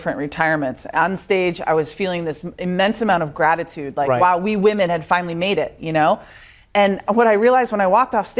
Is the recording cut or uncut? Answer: cut